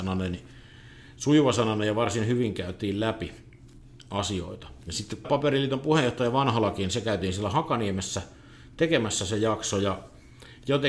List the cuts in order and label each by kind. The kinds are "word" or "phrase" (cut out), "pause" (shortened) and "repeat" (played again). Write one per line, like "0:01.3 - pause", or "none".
0:05.2 - word